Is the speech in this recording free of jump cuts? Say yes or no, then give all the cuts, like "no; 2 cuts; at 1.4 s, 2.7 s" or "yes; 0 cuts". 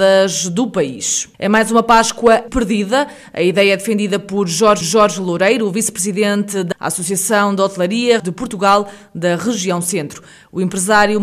no; 5 cuts; at 1.3 s, 2.5 s, 4.8 s, 6.7 s, 8.2 s